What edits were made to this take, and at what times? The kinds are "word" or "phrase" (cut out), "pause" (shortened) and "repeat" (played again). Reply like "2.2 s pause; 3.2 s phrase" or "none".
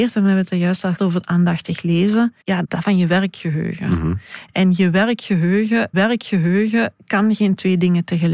1.0 s word; 2.4 s pause; 2.8 s phrase; 5.9 s repeat